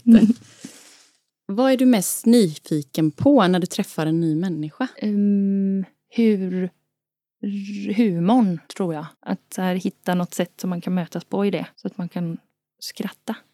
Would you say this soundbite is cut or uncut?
cut